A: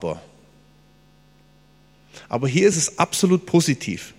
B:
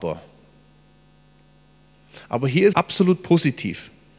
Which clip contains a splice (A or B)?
B